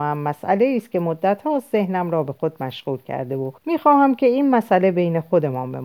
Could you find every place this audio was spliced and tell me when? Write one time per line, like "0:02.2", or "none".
0:03.6